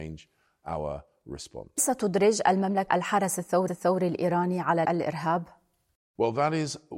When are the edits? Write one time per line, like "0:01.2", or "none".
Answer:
0:01.8
0:02.9
0:03.7
0:04.8